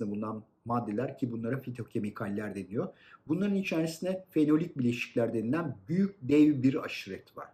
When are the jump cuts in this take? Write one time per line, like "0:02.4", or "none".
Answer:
none

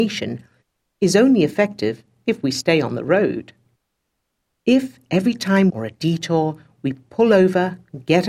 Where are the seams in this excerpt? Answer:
0:05.7

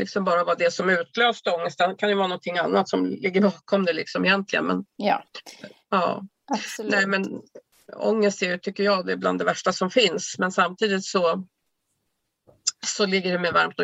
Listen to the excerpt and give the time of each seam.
0:04.9

